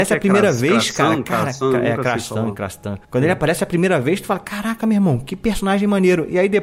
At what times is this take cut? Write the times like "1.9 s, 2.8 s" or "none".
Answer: 3.0 s

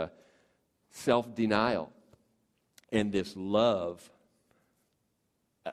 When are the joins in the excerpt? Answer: none

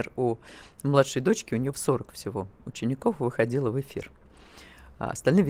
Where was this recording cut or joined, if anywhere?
1.7 s

